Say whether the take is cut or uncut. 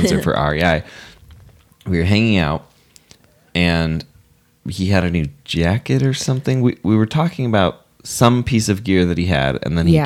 uncut